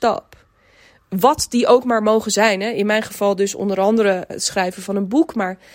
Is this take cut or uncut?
cut